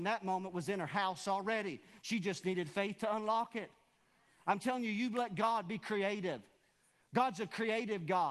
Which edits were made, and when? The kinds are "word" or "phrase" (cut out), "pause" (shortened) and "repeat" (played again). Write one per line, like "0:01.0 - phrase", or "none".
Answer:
none